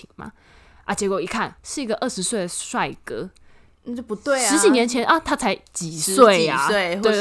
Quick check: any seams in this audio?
yes; 1 cut; at 1.6 s

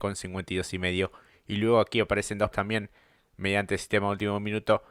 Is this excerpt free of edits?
no; 1 cut; at 2.5 s

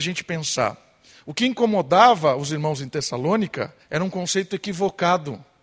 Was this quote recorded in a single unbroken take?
no; 1 cut; at 3.8 s

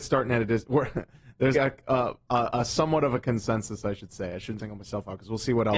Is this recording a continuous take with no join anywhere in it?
no; 2 cuts; at 1.5 s, 4.6 s

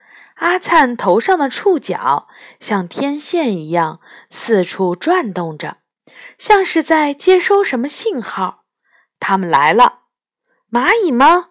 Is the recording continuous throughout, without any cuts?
yes; 0 cuts

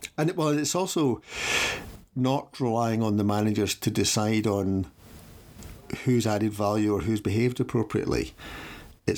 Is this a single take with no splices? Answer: yes; 0 cuts

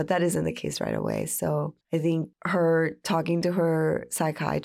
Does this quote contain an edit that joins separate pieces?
yes; 1 cut; at 1.8 s

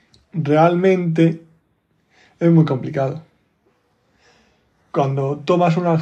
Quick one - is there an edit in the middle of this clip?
no; 0 cuts

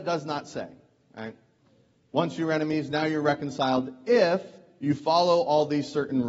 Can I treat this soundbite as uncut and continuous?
yes; 0 cuts

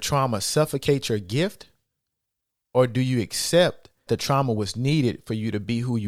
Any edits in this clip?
yes; 1 cut; at 4.1 s

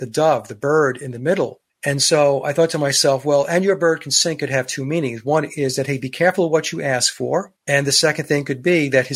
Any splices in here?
yes; 2 cuts; at 1.7 s, 7.6 s

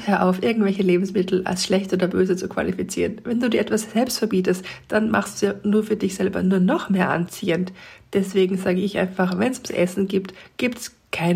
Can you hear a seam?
no; 0 cuts

